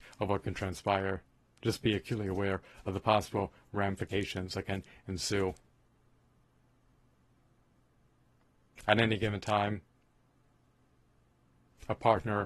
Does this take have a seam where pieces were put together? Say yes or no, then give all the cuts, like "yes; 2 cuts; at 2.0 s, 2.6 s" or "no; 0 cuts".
no; 0 cuts